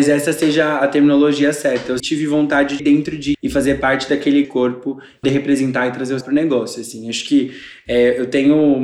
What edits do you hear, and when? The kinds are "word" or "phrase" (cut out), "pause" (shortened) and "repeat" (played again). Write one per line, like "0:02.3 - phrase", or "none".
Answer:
0:02.0 - word
0:02.8 - word
0:03.3 - word
0:04.4 - word
0:05.2 - word
0:06.2 - word